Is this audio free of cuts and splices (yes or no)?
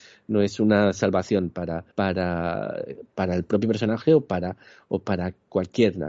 no